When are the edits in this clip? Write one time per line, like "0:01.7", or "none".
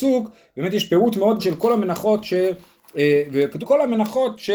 0:01.4
0:03.6